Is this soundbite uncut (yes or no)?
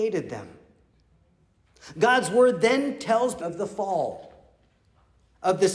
no